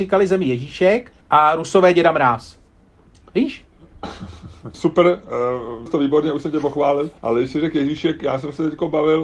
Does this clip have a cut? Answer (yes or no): yes